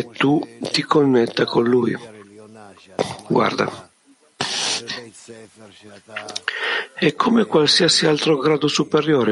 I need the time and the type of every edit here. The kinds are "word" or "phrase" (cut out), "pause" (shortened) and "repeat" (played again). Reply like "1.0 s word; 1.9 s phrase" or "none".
none